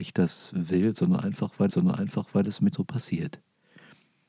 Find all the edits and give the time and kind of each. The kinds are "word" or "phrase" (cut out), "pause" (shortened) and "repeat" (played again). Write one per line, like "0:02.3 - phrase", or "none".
0:01.7 - repeat
0:02.7 - word